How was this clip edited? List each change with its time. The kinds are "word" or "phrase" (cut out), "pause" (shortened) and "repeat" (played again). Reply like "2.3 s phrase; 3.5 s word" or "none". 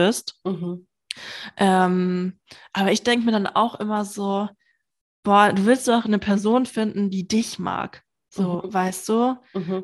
none